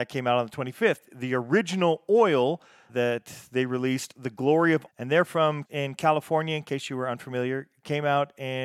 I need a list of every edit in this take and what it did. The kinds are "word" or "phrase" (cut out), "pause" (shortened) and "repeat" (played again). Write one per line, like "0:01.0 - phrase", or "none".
0:02.9 - word
0:04.9 - word
0:05.6 - word

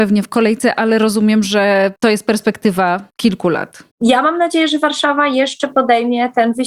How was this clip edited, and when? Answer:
0:02.0 - pause
0:03.1 - pause
0:03.9 - pause

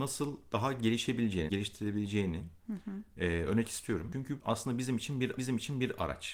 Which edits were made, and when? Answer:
0:01.5 - word
0:03.6 - word
0:04.4 - word
0:05.4 - repeat

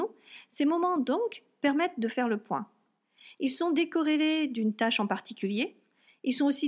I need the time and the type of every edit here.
none

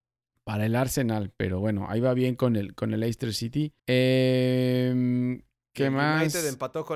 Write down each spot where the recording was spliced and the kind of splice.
0:03.8 - pause

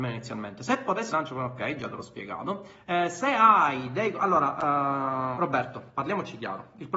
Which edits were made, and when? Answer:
0:01.1 - phrase
0:05.3 - word

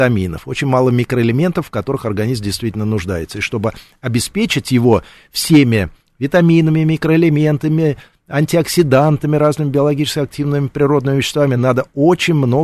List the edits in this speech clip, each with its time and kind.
none

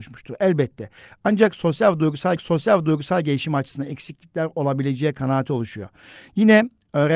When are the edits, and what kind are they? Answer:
0:02.4 - repeat

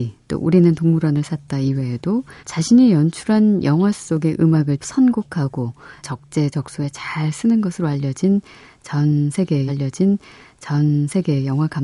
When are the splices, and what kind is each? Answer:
0:02.4 - pause
0:04.8 - word
0:06.0 - word
0:09.7 - repeat

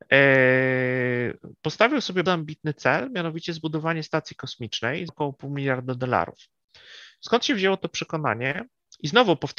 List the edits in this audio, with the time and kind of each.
0:02.3 - word
0:05.1 - word

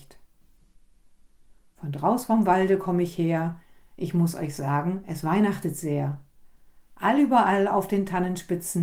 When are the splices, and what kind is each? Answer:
none

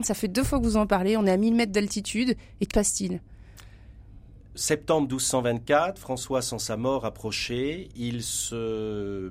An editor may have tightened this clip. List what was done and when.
0:02.7 - word

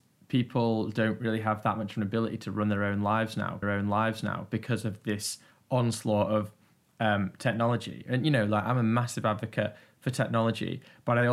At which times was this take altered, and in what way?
0:03.6 - repeat

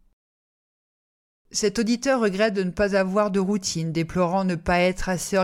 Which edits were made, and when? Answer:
none

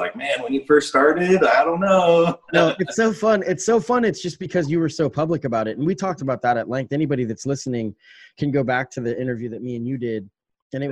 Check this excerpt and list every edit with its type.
none

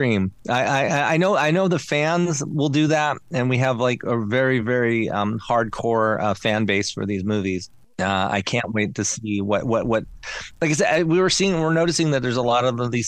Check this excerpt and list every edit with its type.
none

